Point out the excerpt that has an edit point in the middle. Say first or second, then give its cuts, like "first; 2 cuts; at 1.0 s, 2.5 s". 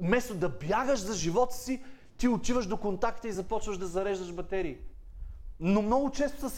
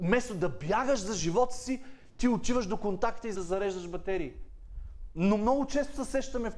second; 1 cut; at 3.3 s